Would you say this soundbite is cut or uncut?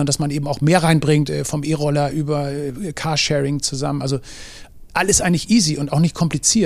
uncut